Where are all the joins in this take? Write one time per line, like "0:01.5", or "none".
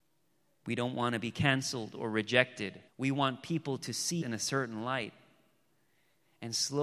0:02.9
0:04.2